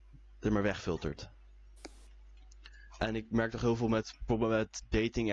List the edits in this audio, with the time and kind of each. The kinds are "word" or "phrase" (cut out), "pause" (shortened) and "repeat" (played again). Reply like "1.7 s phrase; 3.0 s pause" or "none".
none